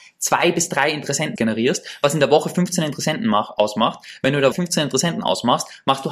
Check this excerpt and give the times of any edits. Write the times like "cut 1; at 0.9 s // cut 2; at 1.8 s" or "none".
cut 1; at 1.4 s // cut 2; at 4.5 s

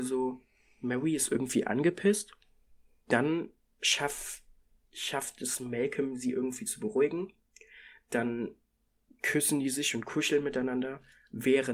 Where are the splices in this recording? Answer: none

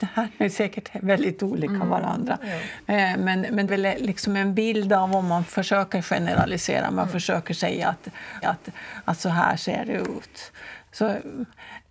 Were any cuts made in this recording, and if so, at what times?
cut 1; at 3.7 s // cut 2; at 5.5 s // cut 3; at 8.4 s // cut 4; at 10.9 s

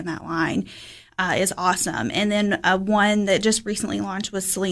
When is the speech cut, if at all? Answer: none

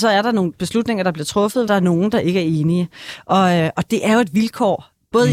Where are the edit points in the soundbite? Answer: cut 1; at 1.7 s

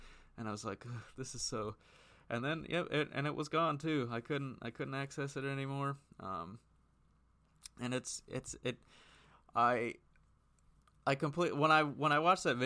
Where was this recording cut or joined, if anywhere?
none

